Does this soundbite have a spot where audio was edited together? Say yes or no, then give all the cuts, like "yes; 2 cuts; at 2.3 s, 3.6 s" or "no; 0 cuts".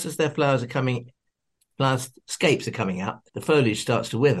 yes; 1 cut; at 3.3 s